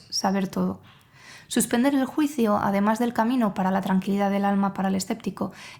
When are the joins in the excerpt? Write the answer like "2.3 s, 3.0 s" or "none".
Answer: none